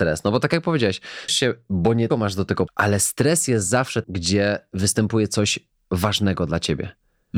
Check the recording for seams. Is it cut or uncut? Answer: cut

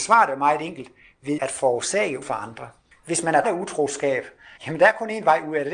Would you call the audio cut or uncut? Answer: cut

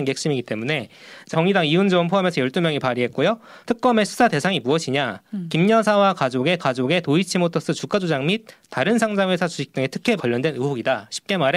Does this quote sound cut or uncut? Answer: cut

